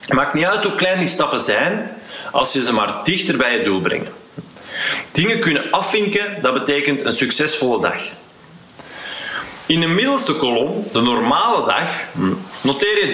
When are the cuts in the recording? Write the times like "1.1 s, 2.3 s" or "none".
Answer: none